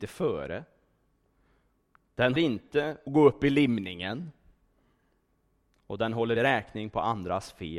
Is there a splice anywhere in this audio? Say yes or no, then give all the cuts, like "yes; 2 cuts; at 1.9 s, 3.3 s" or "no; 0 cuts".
yes; 3 cuts; at 2.4 s, 3.1 s, 6.4 s